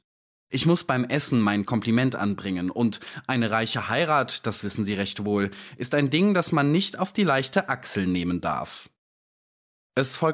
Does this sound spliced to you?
yes; 1 cut; at 1.7 s

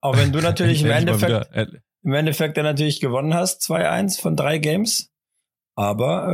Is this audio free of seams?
yes; 0 cuts

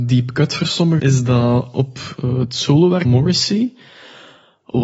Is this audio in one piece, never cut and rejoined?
no; 2 cuts; at 1.0 s, 3.1 s

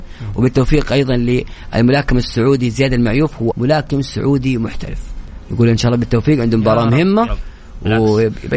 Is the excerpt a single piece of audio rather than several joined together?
no; 2 cuts; at 3.5 s, 7.3 s

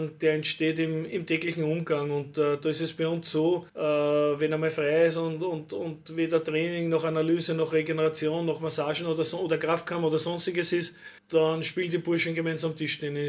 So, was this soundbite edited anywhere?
yes; 2 cuts; at 3.7 s, 11.2 s

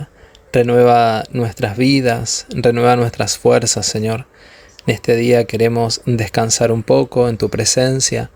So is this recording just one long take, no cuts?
yes; 0 cuts

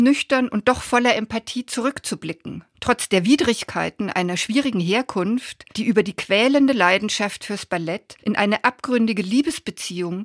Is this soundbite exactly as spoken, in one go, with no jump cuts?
no; 3 cuts; at 2.7 s, 5.7 s, 8.2 s

